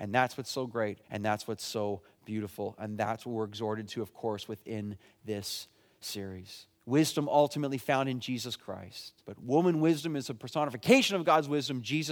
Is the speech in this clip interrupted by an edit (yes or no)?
yes